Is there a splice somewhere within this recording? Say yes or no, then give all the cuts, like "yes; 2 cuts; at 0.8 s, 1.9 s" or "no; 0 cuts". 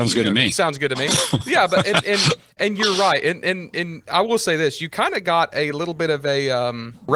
no; 0 cuts